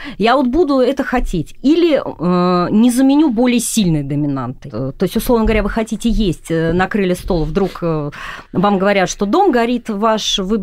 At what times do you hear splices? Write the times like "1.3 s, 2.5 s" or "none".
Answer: none